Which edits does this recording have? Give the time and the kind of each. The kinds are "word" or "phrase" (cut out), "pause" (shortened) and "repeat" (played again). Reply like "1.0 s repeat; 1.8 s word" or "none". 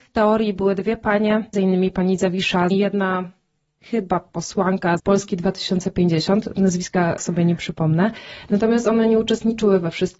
1.5 s word; 2.7 s phrase; 5.0 s word; 7.2 s word